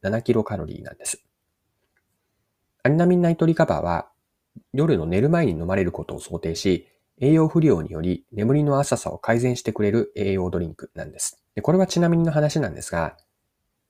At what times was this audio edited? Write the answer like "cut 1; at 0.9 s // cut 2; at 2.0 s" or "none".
cut 1; at 11.5 s